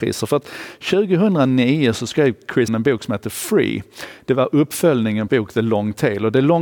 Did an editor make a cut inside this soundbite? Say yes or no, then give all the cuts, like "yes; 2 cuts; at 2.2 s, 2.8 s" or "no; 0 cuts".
yes; 2 cuts; at 2.7 s, 5.3 s